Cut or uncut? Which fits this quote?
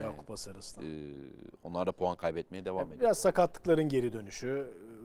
uncut